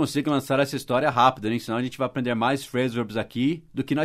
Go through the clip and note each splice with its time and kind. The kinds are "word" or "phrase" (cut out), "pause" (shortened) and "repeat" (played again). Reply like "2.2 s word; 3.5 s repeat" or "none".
none

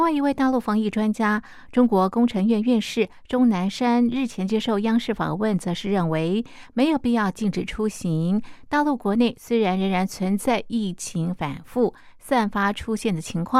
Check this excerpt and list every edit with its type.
none

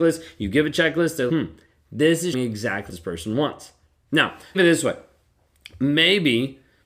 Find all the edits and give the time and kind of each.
1.3 s word; 2.3 s word; 2.9 s word; 4.5 s word

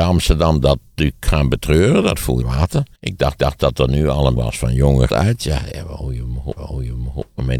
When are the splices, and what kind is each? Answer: 2.4 s phrase; 3.0 s pause; 3.4 s repeat; 4.4 s word; 5.1 s phrase; 6.6 s repeat

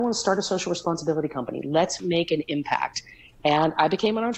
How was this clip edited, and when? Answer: none

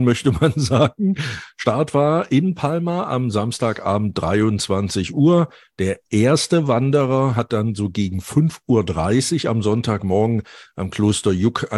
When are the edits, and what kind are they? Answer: none

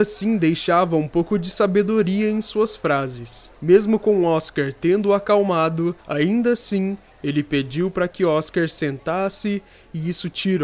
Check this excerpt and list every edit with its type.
3.5 s pause; 6.0 s pause

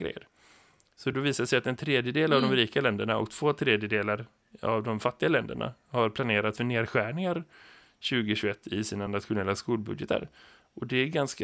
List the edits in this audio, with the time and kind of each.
none

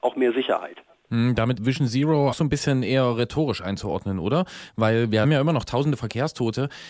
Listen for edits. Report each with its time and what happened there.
1.6 s word; 2.3 s phrase; 5.2 s word

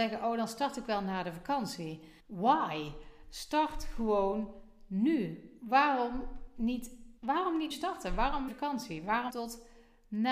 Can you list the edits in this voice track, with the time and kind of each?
2.2 s pause; 7.2 s pause; 7.7 s word; 8.5 s phrase; 9.3 s word

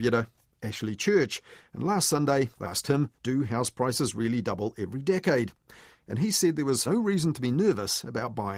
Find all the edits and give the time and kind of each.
2.6 s word; 3.2 s pause; 6.9 s word

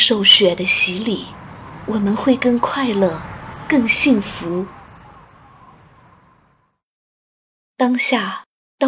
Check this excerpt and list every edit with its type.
none

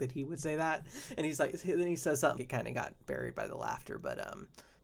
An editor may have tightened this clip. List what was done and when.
2.4 s word

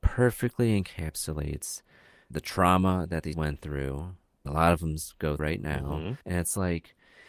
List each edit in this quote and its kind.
2.3 s word; 3.3 s word; 4.5 s word; 5.4 s word; 6.2 s pause

